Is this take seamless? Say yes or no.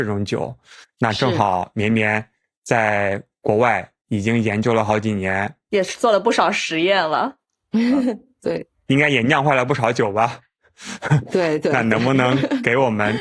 yes